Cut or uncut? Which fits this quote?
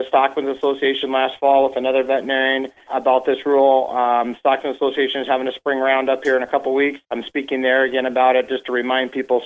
cut